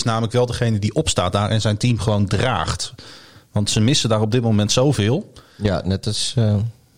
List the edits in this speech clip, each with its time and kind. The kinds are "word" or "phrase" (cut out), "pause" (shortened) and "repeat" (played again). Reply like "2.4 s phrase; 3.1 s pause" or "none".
none